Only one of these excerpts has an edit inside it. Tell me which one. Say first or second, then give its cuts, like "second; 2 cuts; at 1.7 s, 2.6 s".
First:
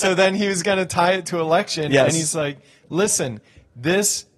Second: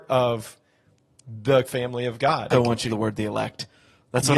second; 3 cuts; at 1.6 s, 2.5 s, 2.9 s